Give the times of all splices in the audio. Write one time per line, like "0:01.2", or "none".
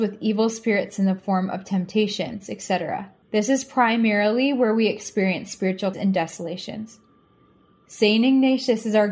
0:03.2
0:05.9